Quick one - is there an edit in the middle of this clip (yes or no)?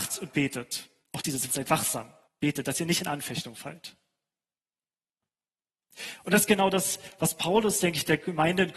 yes